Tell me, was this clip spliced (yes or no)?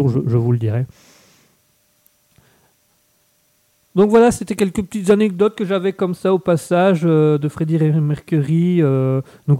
yes